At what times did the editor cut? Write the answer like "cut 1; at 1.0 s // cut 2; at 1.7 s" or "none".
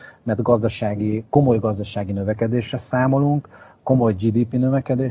none